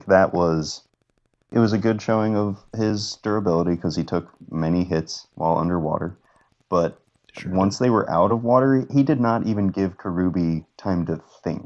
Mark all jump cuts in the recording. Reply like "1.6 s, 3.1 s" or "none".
none